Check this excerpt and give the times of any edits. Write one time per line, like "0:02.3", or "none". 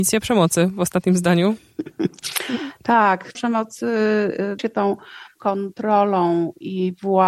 0:03.3
0:04.6
0:05.4